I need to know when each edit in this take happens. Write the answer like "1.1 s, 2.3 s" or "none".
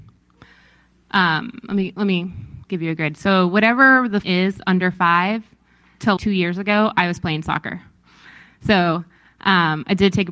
2.6 s, 4.2 s, 6.2 s